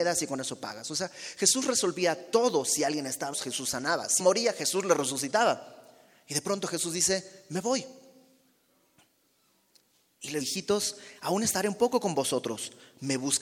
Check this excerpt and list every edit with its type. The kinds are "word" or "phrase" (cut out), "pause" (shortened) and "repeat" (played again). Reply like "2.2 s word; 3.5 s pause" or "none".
3.3 s word; 4.2 s word; 10.4 s word